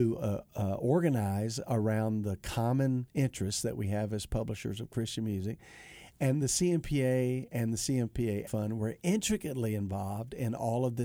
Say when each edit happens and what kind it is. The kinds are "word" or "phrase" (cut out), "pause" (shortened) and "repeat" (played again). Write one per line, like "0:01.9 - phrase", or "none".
0:08.5 - word